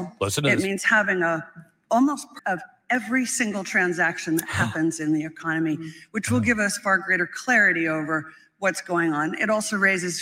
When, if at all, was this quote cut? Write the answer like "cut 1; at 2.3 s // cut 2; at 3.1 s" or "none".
cut 1; at 2.4 s